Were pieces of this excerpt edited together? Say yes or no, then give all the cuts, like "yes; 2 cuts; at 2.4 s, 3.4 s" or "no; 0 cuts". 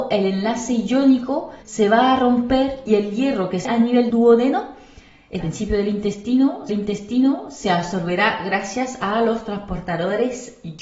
yes; 6 cuts; at 1.6 s, 2.9 s, 3.7 s, 4.1 s, 5.4 s, 6.7 s